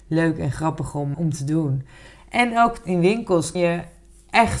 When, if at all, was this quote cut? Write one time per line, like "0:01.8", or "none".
0:01.1
0:03.5

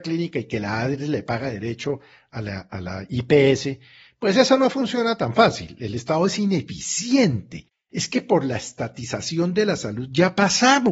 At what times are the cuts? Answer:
none

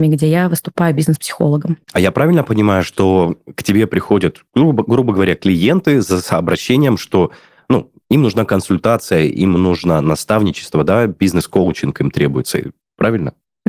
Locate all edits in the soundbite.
none

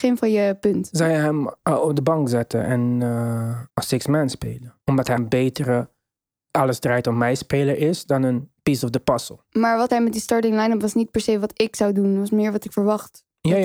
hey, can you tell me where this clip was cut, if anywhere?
0:03.7
0:04.8
0:05.2
0:06.5
0:08.6
0:09.9

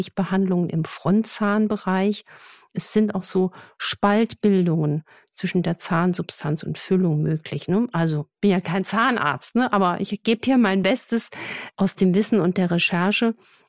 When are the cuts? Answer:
none

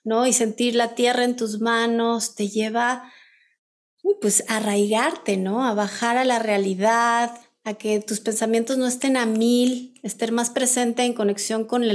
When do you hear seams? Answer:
none

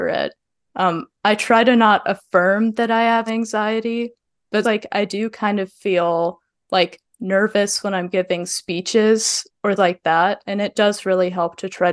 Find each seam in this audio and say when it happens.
0:03.3
0:04.6
0:09.8

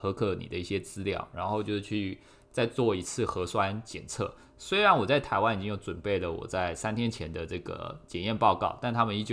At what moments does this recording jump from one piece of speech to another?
none

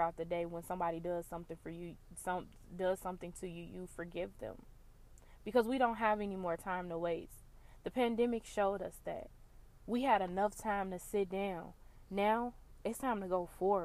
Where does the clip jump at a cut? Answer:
none

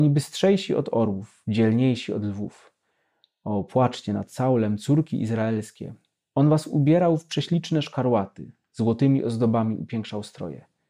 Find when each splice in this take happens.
none

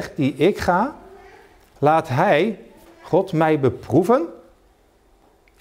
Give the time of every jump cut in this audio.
none

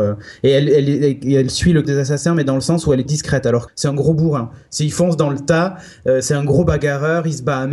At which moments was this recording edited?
0:01.8
0:03.1
0:03.7

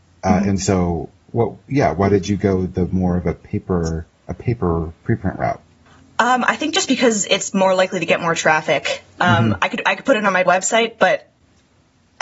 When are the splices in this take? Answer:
0:05.9
0:10.5

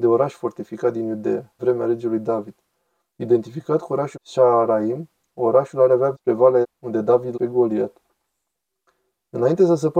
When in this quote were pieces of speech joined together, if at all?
0:01.6
0:04.1
0:06.1
0:06.6
0:07.3

